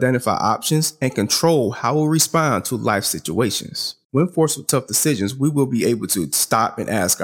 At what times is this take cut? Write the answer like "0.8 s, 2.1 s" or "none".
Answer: 4.0 s